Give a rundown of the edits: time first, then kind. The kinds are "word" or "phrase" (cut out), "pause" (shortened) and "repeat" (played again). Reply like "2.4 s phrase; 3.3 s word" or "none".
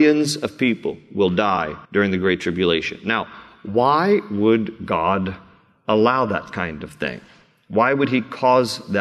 1.8 s pause